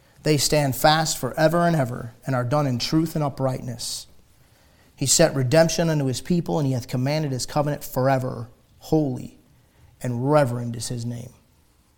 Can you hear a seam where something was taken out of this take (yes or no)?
no